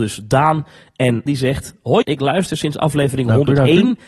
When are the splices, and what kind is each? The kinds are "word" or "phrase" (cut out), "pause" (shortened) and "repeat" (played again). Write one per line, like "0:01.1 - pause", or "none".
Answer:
0:01.3 - word
0:02.0 - word